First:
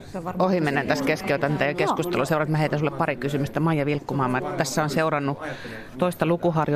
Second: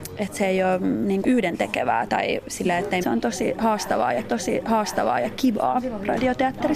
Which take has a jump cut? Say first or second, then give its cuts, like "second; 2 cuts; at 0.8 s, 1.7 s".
second; 4 cuts; at 1.2 s, 2.1 s, 3.0 s, 4.3 s